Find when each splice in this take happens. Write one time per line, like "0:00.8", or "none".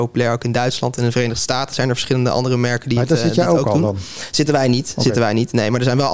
none